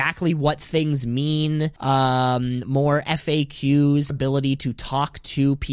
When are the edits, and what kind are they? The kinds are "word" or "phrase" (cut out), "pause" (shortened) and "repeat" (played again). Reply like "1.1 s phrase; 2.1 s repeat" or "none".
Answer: 1.8 s pause; 4.1 s word